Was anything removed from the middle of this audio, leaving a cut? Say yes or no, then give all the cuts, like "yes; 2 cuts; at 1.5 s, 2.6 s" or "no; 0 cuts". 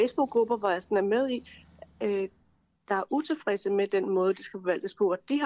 no; 0 cuts